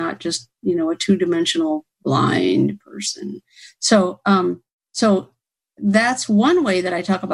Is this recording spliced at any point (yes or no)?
no